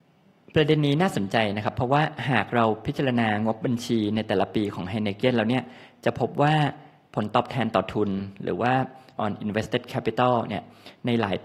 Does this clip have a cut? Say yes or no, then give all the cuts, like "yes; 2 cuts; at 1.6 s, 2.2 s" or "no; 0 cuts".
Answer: yes; 1 cut; at 9.2 s